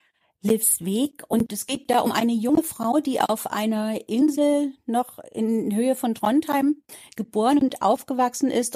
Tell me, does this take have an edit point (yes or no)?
no